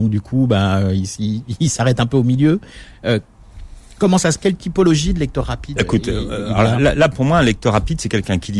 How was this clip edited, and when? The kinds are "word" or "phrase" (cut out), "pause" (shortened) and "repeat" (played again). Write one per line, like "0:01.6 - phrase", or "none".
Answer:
0:04.4 - word
0:05.8 - word